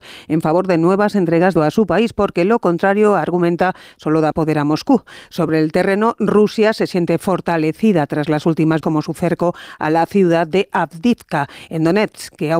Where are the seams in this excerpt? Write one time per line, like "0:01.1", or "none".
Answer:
0:01.6
0:04.3
0:08.8

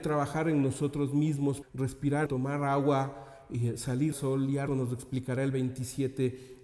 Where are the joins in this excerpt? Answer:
0:01.6
0:02.3
0:04.1
0:04.7

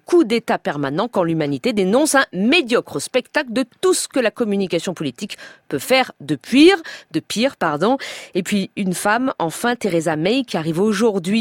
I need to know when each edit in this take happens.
none

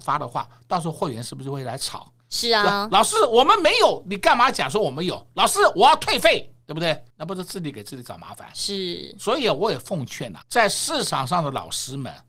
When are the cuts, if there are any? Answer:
0:07.1
0:10.4

